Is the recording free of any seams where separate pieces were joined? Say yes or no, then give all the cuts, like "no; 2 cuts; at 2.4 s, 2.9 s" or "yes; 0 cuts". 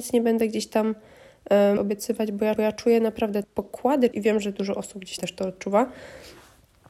no; 5 cuts; at 1.8 s, 2.6 s, 3.4 s, 4.1 s, 5.2 s